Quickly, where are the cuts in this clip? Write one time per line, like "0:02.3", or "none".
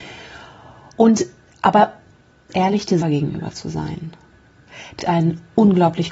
0:02.5
0:03.0
0:05.0